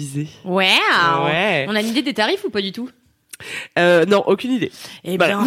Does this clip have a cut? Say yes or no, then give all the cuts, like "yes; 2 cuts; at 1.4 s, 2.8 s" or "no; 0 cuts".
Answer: no; 0 cuts